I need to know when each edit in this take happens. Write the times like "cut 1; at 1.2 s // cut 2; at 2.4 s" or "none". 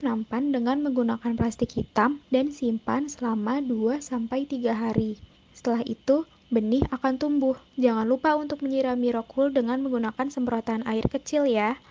cut 1; at 2.2 s // cut 2; at 5.4 s // cut 3; at 7.7 s